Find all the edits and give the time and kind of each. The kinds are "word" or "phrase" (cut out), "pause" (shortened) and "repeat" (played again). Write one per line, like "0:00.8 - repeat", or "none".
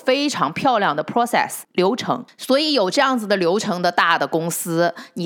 none